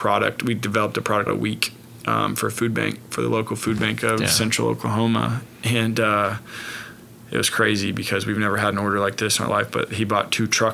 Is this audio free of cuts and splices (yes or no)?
no